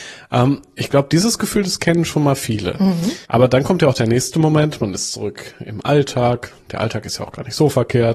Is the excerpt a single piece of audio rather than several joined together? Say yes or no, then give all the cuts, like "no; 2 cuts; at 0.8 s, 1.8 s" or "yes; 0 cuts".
no; 1 cut; at 3.2 s